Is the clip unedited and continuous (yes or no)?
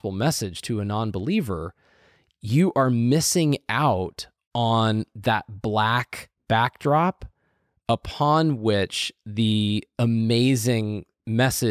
yes